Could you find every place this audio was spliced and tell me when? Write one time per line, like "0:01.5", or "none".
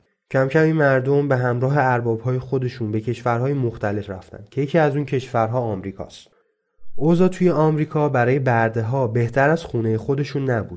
none